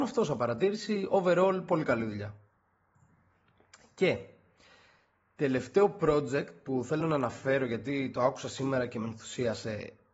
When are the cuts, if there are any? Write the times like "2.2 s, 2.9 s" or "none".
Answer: none